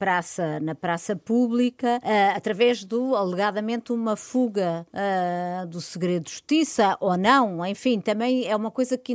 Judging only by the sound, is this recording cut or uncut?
uncut